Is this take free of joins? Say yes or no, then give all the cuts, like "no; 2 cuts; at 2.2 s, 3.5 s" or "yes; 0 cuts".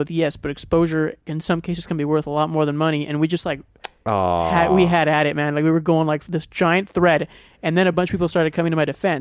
yes; 0 cuts